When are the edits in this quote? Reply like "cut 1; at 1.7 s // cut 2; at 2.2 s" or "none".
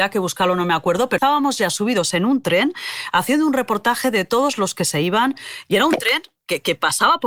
cut 1; at 1.2 s